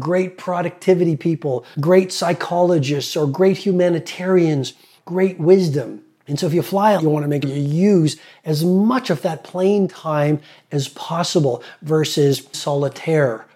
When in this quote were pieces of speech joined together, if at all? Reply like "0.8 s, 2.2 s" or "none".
1.7 s, 5.0 s, 7.0 s, 7.4 s, 12.5 s